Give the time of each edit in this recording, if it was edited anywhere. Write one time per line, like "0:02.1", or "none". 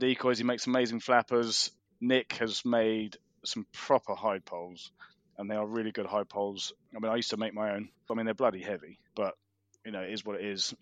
0:09.1